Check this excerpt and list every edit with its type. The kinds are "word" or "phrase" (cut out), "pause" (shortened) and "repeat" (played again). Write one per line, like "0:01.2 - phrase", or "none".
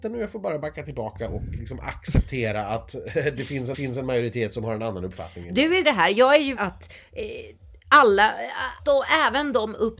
0:01.6 - word
0:03.7 - repeat
0:05.8 - phrase
0:06.6 - phrase
0:08.8 - word